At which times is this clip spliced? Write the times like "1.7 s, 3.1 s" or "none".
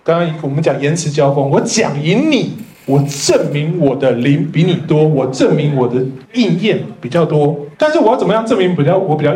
2.7 s, 6.2 s, 7.7 s